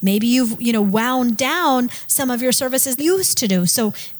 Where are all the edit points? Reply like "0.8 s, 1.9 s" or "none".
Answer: 3.0 s